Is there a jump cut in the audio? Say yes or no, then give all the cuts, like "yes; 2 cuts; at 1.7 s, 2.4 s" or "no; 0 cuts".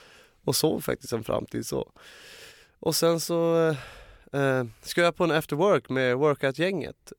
no; 0 cuts